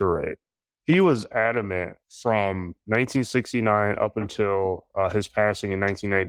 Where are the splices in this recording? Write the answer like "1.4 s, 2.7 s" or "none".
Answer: 2.0 s